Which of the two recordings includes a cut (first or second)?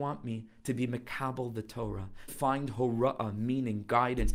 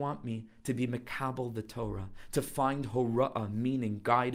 first